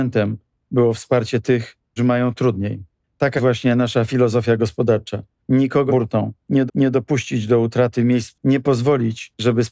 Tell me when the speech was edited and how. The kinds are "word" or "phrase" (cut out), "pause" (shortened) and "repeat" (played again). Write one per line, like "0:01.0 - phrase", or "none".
0:02.0 - word
0:03.4 - word
0:05.9 - phrase
0:06.7 - repeat
0:08.3 - word